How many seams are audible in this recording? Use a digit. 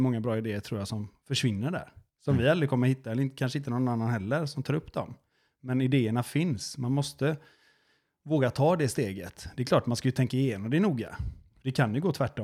0